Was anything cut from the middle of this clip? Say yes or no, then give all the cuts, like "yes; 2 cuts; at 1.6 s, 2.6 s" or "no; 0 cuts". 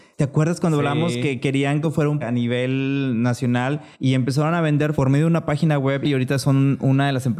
yes; 4 cuts; at 1.8 s, 2.2 s, 3.9 s, 4.9 s